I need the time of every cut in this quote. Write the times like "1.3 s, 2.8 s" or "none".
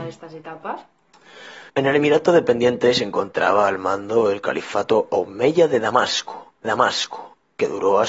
1.7 s, 6.6 s